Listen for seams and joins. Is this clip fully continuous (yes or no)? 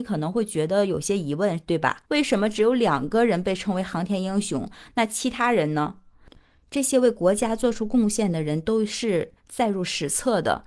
no